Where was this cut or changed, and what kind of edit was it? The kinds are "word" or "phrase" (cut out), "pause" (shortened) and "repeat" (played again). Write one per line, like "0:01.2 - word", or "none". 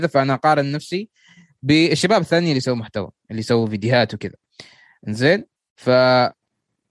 none